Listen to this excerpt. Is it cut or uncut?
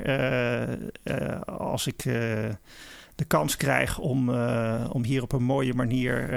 uncut